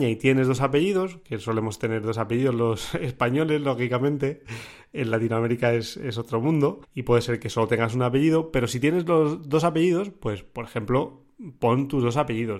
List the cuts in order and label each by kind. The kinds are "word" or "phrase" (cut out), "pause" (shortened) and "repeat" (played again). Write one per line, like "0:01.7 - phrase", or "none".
0:06.8 - pause